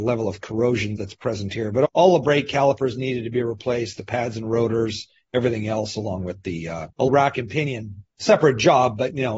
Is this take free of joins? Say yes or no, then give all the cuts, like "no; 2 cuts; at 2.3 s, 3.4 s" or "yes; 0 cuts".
no; 1 cut; at 6.9 s